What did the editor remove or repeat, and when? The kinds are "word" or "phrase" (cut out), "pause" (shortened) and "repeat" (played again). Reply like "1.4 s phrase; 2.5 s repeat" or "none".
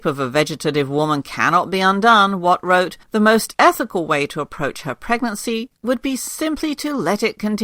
3.0 s pause